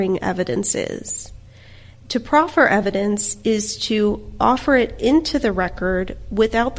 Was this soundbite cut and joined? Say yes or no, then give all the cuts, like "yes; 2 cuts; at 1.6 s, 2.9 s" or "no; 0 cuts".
no; 0 cuts